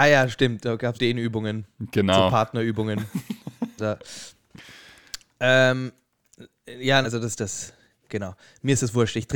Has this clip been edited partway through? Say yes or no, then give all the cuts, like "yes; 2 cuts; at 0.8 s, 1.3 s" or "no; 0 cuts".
yes; 4 cuts; at 0.9 s, 3.8 s, 7.0 s, 7.3 s